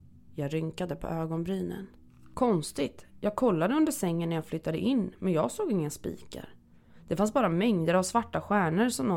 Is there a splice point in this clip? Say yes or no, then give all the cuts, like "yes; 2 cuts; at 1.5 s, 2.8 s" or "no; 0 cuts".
no; 0 cuts